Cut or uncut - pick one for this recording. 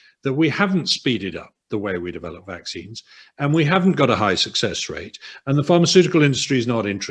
uncut